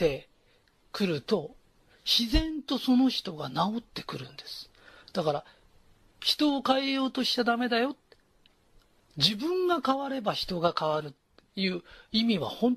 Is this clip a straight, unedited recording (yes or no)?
yes